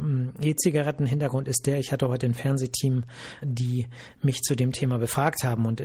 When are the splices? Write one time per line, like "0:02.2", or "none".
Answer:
0:03.4